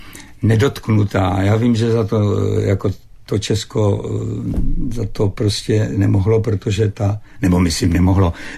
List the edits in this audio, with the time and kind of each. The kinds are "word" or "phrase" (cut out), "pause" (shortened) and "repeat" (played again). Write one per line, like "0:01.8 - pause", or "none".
none